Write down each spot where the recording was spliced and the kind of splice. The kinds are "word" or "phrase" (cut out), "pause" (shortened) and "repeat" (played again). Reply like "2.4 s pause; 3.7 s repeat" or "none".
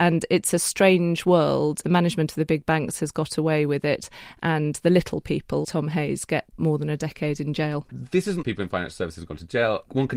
1.8 s phrase; 5.6 s word; 6.6 s word; 8.4 s phrase